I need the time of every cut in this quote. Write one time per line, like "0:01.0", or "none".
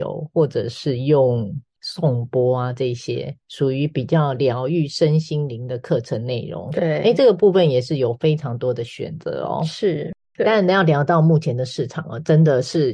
0:10.2